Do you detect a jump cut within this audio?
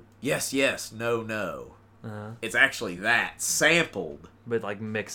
no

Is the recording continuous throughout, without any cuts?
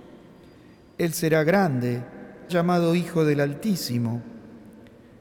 no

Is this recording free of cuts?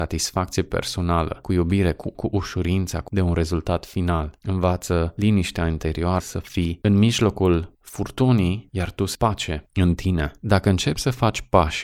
no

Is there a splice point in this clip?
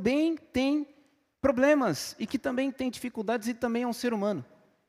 no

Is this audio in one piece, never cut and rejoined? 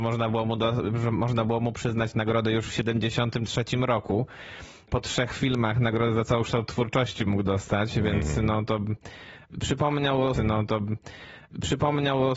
no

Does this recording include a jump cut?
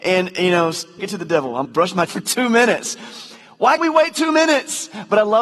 yes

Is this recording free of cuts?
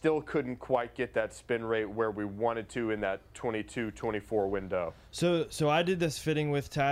yes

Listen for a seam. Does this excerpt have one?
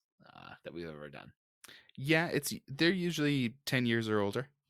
no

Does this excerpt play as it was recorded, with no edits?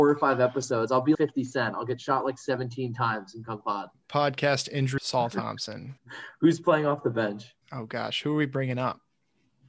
no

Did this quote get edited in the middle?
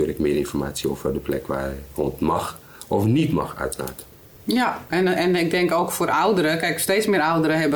no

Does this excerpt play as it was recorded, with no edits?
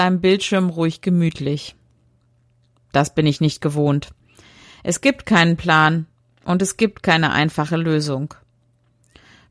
yes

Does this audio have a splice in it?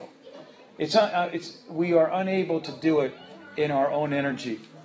no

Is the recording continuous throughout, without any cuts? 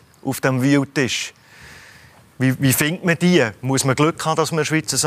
yes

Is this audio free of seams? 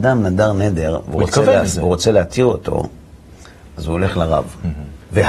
yes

